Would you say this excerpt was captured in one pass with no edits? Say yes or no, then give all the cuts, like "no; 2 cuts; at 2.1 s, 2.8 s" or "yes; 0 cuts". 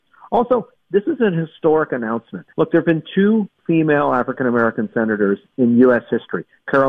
no; 1 cut; at 2.5 s